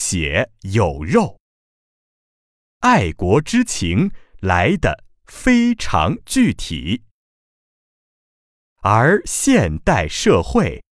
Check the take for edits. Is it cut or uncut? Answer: uncut